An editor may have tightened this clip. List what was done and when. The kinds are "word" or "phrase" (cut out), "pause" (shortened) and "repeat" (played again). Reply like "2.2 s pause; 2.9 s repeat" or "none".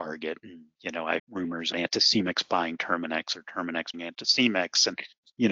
1.2 s word; 1.7 s word; 3.9 s word